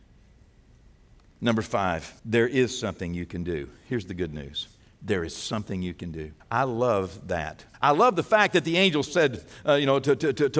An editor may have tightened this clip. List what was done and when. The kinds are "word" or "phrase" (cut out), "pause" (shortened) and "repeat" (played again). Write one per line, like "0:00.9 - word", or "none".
0:02.2 - pause
0:04.8 - pause
0:06.4 - pause
0:07.7 - pause